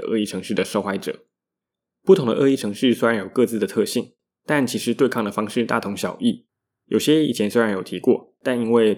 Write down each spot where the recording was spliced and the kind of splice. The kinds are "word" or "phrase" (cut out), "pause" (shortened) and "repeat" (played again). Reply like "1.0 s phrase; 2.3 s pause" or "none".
none